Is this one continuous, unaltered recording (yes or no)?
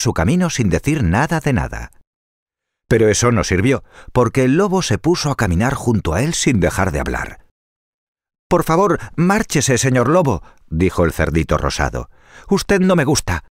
yes